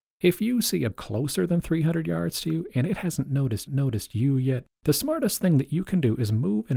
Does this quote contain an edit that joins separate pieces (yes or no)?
yes